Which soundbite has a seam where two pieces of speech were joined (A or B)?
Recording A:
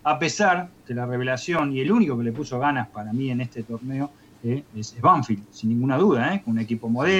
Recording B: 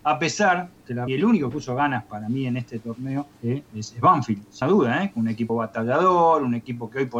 B